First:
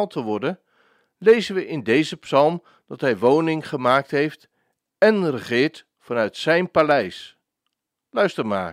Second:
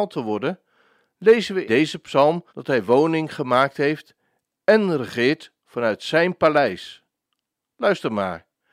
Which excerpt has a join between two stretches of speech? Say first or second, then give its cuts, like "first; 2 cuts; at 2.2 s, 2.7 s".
second; 2 cuts; at 1.7 s, 2.5 s